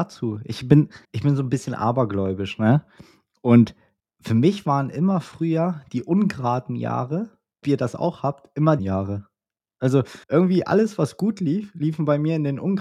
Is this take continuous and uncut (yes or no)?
no